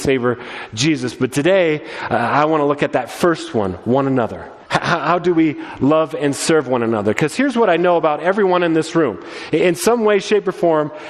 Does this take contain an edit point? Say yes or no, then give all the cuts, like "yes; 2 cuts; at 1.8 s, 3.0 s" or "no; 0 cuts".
yes; 1 cut; at 4.6 s